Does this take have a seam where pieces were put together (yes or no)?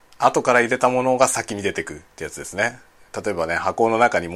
yes